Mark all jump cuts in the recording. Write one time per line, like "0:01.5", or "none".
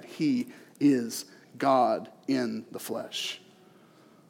none